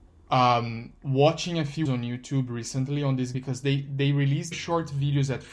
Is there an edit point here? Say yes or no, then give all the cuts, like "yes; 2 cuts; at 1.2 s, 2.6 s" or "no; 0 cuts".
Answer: yes; 3 cuts; at 1.9 s, 3.3 s, 4.5 s